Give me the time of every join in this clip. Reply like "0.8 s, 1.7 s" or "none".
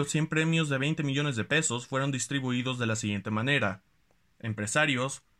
none